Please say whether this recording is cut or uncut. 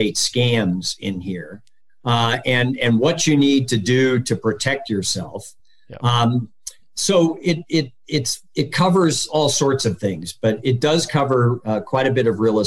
uncut